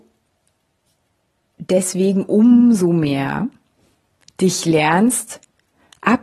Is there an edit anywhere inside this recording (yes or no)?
no